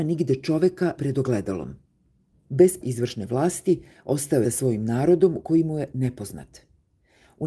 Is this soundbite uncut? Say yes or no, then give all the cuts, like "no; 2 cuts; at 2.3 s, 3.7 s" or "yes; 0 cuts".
no; 4 cuts; at 1.0 s, 2.8 s, 4.4 s, 5.9 s